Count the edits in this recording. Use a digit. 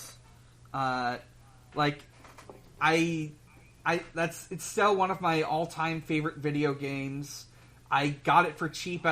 0